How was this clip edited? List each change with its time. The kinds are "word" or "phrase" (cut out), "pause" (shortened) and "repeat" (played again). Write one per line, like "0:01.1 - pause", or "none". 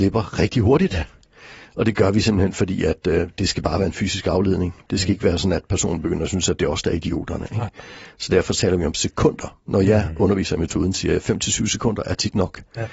none